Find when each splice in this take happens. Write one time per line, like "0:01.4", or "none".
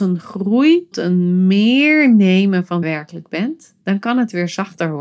0:00.9
0:02.8
0:03.8